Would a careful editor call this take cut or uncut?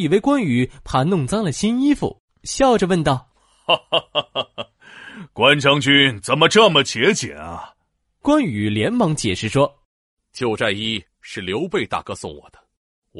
uncut